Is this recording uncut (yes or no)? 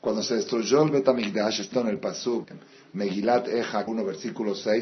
no